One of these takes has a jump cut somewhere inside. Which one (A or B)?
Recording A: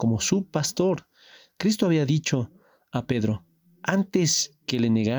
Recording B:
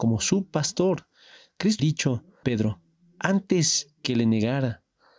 B